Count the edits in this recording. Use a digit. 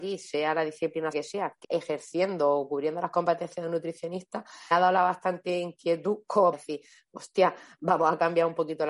4